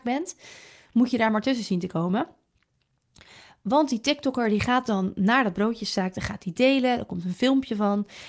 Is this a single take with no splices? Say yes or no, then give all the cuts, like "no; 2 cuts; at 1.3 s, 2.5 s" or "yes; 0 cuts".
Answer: yes; 0 cuts